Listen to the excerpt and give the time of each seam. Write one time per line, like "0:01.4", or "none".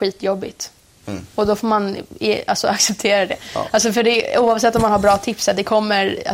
none